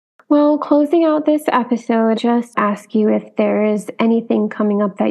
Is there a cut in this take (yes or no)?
yes